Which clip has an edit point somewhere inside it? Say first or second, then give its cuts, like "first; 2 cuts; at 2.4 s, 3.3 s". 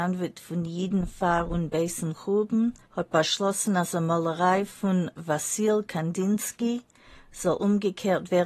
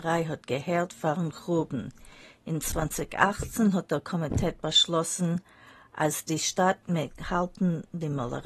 first; 1 cut; at 2.8 s